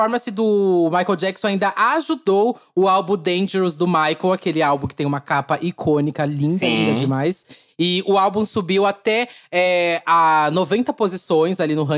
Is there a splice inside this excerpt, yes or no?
no